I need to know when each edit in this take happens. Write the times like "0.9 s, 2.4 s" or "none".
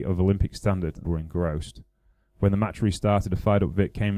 1.0 s

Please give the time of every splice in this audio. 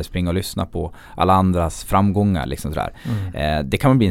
none

